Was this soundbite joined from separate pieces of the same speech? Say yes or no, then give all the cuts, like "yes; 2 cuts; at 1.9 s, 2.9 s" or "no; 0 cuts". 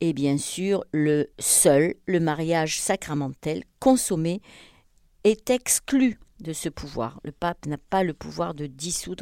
yes; 1 cut; at 1.3 s